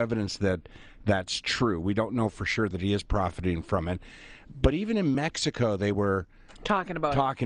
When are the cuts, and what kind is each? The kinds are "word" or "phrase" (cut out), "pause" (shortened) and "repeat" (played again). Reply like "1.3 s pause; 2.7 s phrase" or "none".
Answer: none